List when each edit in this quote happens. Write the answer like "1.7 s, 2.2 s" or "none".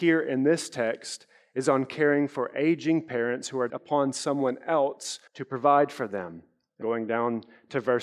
3.7 s, 5.3 s, 6.8 s